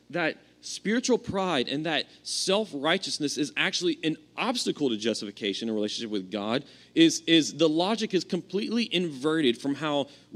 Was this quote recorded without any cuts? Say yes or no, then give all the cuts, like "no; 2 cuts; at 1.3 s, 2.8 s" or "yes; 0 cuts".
yes; 0 cuts